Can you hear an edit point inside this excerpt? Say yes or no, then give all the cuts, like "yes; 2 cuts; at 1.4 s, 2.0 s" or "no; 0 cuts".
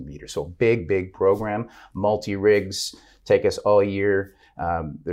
no; 0 cuts